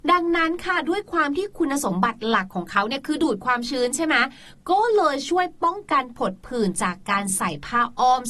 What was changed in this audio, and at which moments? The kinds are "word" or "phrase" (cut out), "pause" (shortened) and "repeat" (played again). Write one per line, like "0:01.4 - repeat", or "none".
none